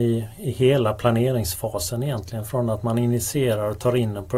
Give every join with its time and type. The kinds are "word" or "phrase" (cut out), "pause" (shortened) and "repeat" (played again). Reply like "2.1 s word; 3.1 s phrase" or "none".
none